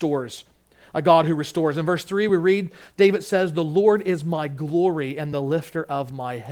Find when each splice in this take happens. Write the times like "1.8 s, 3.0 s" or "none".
none